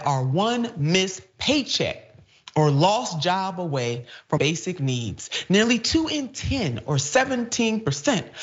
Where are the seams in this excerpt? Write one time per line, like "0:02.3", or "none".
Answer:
0:04.4

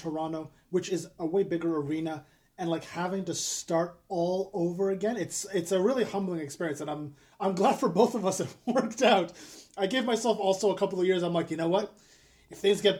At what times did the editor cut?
none

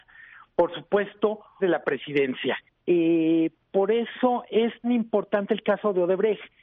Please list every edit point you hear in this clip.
0:01.6
0:02.7
0:04.8

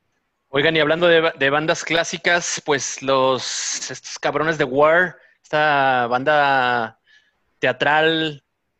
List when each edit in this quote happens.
none

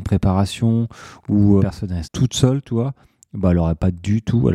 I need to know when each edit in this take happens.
0:01.6
0:02.0

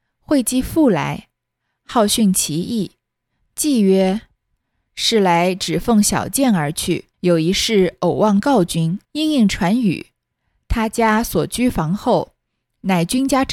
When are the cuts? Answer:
0:07.1
0:09.0

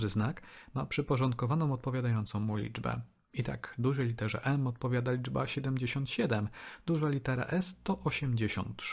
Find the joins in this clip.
none

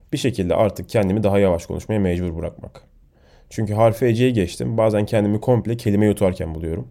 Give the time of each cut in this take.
none

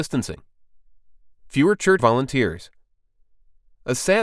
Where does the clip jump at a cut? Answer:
0:02.0

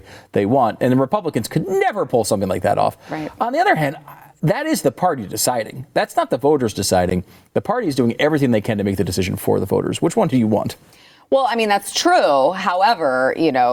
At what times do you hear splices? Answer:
none

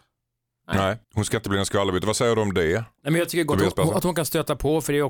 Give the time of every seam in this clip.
0:01.0

